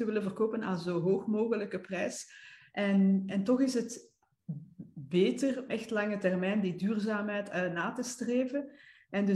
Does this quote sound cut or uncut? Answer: cut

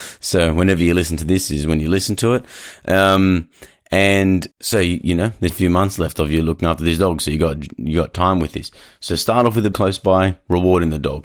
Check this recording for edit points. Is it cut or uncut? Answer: cut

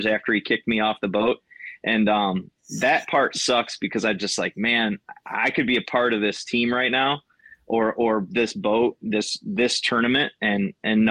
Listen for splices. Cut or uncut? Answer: uncut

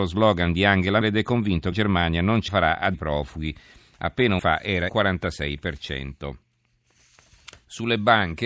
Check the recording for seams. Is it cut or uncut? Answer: cut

